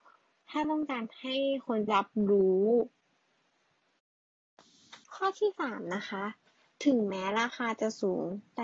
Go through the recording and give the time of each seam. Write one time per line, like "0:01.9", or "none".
0:01.9
0:05.0

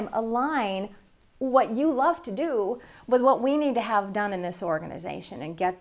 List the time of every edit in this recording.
none

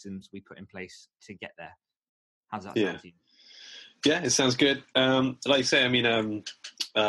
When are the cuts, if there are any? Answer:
none

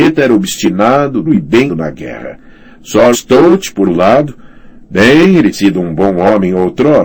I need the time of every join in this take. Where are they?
0:01.2
0:01.7
0:03.1
0:03.8
0:05.5

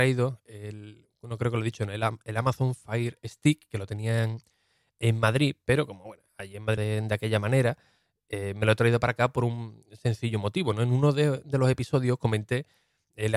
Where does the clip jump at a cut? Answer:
0:06.8

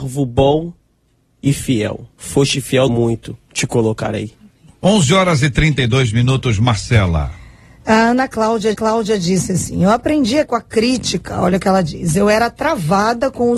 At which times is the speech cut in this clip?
0:02.1
0:02.9
0:08.7
0:10.5

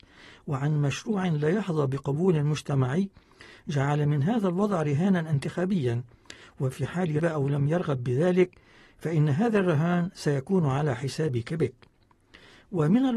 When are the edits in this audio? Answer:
0:07.2

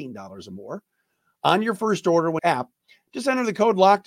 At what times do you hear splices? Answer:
0:02.4

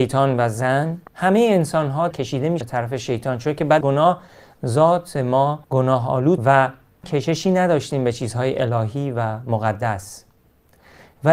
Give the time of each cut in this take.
0:01.1
0:02.1
0:02.6
0:03.8
0:05.6
0:06.4
0:07.0

